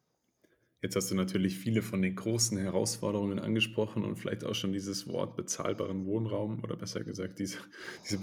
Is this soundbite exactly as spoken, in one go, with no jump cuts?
yes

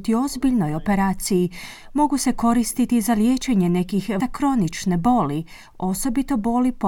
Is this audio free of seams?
no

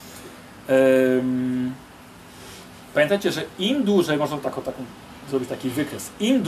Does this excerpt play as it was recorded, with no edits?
yes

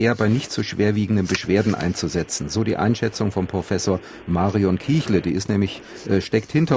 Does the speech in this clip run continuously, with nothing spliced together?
yes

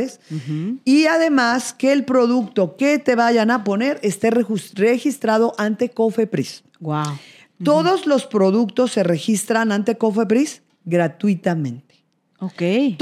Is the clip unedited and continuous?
yes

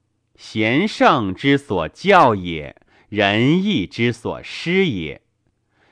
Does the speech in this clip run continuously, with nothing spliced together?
yes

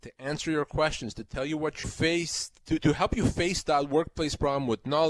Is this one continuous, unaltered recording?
no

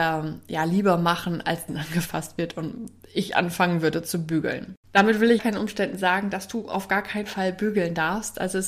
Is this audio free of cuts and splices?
no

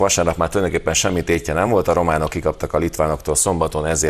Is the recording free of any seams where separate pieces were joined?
yes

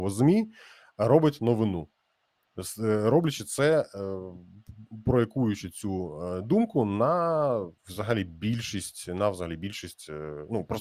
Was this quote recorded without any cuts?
no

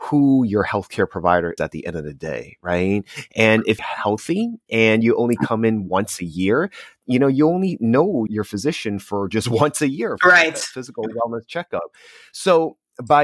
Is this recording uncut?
no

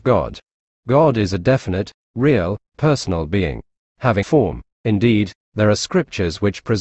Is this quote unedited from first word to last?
no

